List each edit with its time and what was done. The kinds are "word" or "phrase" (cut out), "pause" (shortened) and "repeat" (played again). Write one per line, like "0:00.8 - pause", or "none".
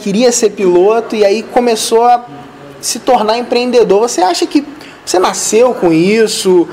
none